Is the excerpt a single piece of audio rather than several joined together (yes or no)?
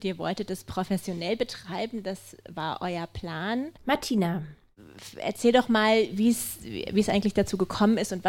no